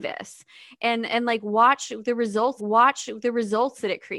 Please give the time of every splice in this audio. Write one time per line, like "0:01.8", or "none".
0:02.6